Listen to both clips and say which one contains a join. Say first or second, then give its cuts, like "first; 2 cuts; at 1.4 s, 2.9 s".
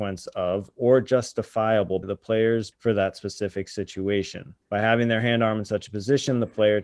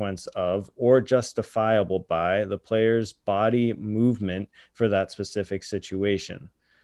first; 3 cuts; at 2.0 s, 2.7 s, 4.6 s